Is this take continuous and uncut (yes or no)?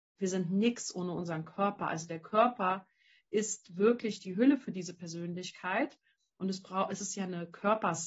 yes